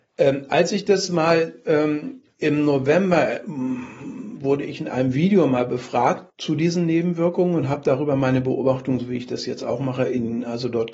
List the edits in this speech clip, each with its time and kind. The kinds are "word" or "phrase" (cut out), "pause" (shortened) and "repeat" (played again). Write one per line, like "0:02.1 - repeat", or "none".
0:06.3 - pause

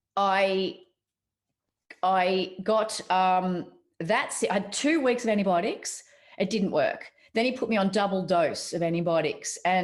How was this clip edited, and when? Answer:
none

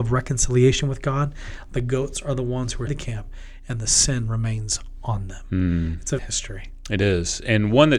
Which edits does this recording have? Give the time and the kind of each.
0:02.9 - phrase
0:06.2 - phrase

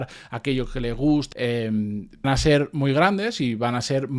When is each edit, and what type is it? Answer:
0:01.3 - phrase
0:02.2 - word

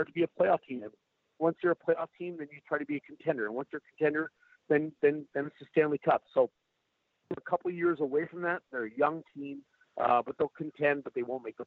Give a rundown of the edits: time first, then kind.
none

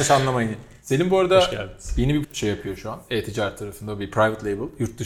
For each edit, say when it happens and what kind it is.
0:02.2 - word

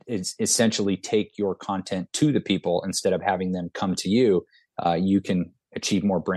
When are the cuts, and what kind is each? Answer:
none

